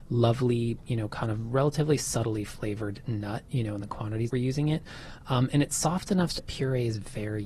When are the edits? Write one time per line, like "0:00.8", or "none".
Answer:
0:04.3
0:06.4